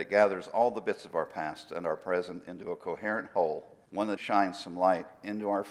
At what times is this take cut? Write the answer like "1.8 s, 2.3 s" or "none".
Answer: 3.8 s, 4.2 s